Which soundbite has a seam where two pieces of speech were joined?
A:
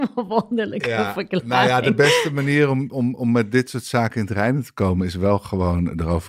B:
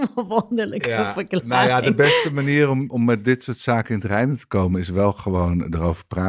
B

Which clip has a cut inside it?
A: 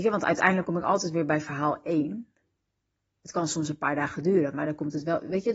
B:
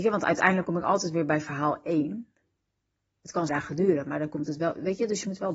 B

